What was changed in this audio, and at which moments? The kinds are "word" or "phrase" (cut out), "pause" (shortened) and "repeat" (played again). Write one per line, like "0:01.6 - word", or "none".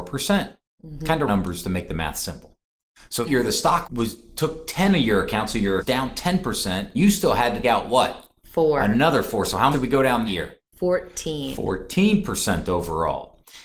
0:01.3 - word
0:03.2 - word
0:03.8 - word
0:05.8 - word
0:06.9 - word
0:07.6 - word
0:09.7 - word
0:10.3 - word